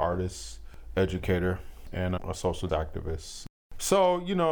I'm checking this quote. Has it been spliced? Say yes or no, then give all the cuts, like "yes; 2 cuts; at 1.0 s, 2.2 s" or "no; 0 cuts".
yes; 2 cuts; at 2.2 s, 2.7 s